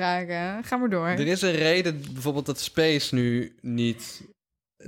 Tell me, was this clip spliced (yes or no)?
no